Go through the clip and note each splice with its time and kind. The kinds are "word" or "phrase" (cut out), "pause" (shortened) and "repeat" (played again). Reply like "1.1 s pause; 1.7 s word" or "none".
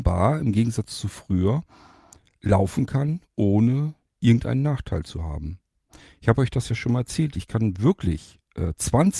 none